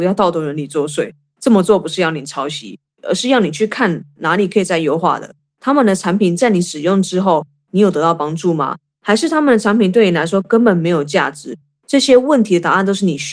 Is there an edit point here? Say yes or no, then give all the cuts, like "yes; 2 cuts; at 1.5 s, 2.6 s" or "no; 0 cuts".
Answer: no; 0 cuts